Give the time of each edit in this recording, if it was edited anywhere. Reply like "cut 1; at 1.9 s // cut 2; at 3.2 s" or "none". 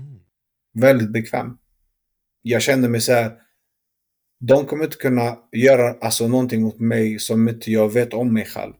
none